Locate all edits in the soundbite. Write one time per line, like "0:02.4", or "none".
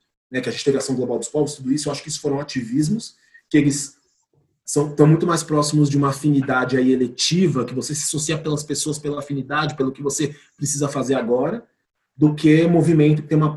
none